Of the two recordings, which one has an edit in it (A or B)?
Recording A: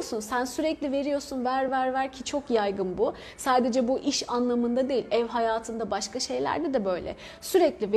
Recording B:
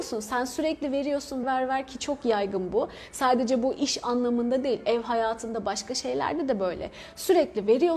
B